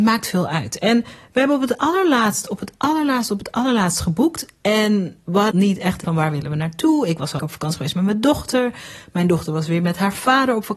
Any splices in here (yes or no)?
yes